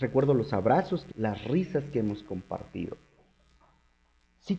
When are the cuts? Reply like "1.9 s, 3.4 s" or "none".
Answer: 1.1 s